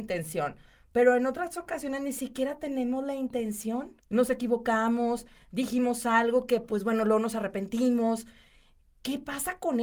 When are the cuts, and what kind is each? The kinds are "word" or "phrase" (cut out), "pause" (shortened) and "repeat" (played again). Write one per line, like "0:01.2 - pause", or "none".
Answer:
0:04.0 - pause